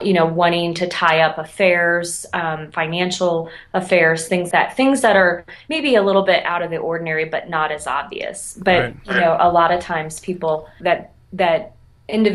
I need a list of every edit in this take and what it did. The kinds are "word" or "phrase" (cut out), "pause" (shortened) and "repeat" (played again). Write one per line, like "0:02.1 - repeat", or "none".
0:04.5 - word
0:10.8 - phrase